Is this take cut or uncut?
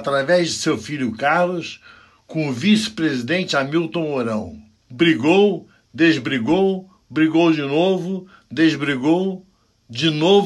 uncut